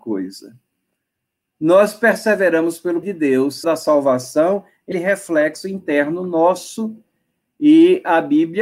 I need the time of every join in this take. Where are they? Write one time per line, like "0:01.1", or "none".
0:03.0
0:03.6
0:04.9